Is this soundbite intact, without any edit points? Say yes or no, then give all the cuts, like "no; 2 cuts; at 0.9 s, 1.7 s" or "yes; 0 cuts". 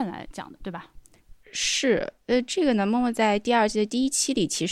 yes; 0 cuts